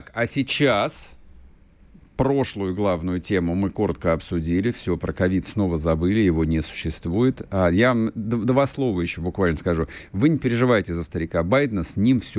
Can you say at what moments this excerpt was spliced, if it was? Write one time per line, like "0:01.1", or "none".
none

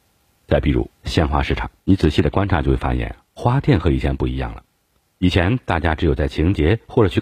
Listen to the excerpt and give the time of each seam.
0:01.8

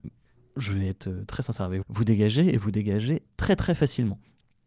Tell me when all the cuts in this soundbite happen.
0:01.8

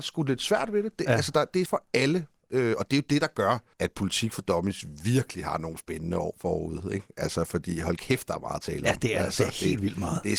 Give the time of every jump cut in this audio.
0:01.7
0:03.7

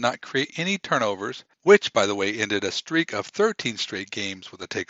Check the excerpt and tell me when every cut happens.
0:01.5

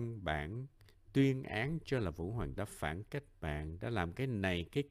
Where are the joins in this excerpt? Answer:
0:02.6

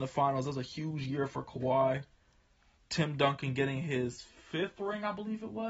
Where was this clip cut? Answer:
none

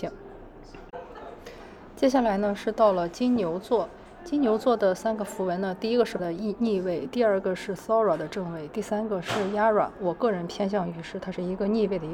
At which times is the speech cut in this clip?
0:06.2

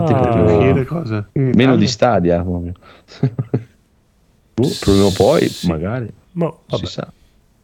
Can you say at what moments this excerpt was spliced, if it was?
0:01.3

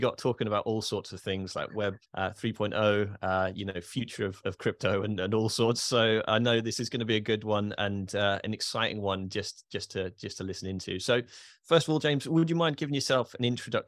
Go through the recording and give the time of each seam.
0:02.1

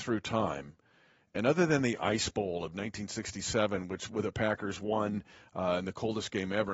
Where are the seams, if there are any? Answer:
none

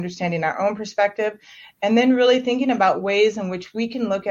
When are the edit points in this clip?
none

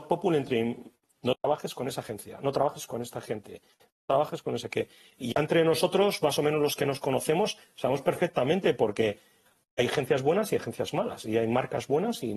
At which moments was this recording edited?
none

